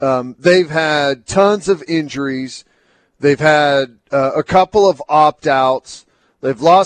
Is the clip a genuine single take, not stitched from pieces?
yes; 0 cuts

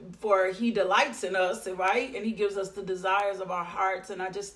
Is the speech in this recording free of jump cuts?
yes; 0 cuts

